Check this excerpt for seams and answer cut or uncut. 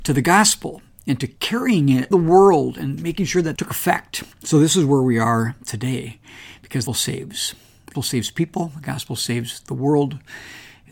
cut